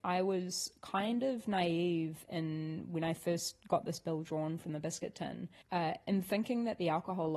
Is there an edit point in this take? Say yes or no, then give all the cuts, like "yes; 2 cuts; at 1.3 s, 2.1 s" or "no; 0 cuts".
no; 0 cuts